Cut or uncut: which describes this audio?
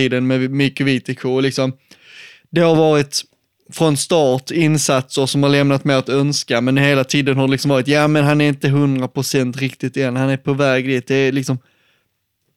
uncut